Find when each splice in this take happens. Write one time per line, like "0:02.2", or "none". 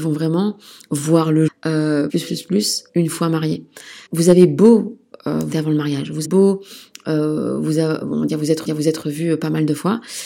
0:01.5
0:02.1
0:02.9
0:04.1
0:05.5
0:06.2
0:08.7